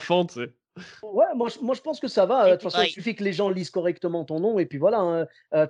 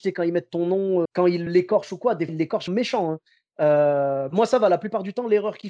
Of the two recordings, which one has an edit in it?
second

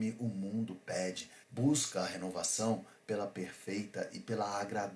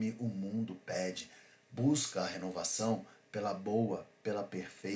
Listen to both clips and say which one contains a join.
first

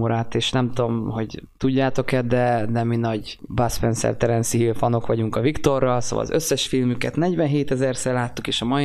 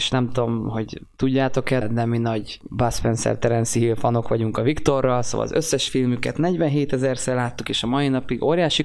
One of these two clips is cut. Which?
second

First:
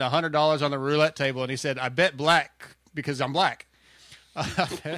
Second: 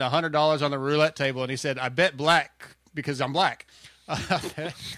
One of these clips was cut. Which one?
second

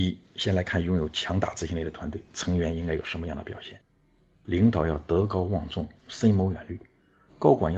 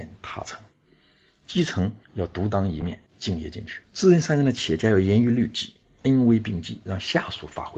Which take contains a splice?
second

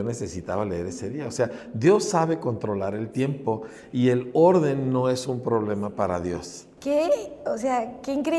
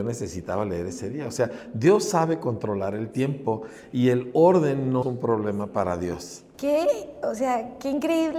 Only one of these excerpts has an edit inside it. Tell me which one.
second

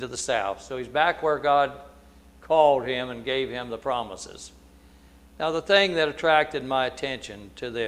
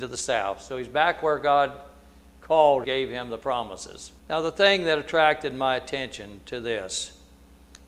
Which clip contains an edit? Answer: second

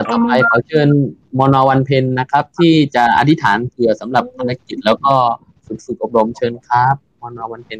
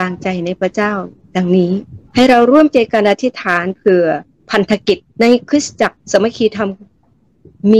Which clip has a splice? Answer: second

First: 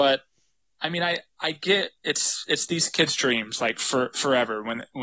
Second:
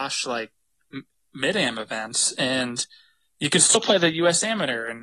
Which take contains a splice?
first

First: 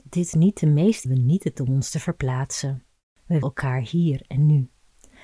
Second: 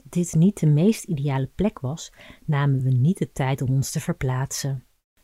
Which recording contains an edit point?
first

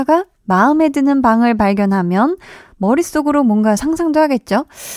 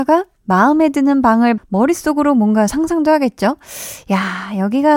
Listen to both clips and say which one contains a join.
second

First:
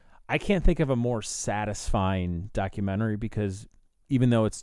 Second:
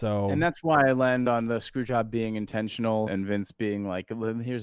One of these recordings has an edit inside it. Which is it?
second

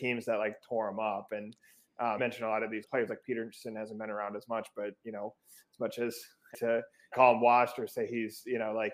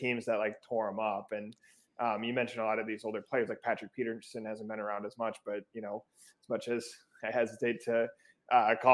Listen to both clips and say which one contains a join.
first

